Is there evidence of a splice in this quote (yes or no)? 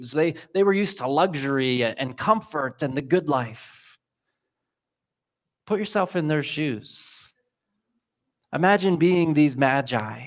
no